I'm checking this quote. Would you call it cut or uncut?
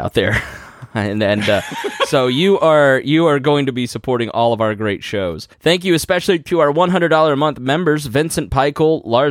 cut